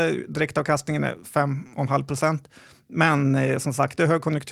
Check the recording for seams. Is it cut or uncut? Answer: uncut